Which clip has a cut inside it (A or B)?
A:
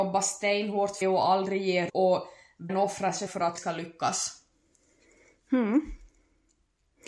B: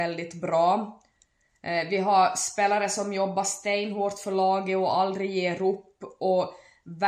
A